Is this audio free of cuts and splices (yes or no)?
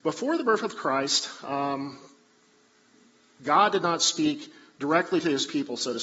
yes